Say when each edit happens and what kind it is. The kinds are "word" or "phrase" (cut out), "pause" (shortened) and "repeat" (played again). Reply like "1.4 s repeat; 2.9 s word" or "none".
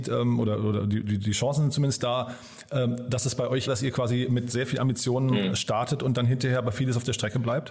3.7 s phrase